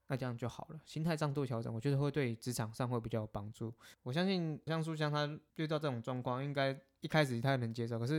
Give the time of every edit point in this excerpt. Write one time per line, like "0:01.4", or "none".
0:03.9
0:04.7